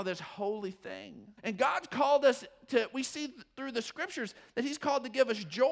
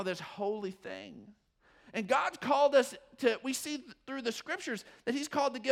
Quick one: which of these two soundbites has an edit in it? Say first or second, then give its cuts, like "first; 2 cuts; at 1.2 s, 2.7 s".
first; 1 cut; at 1.4 s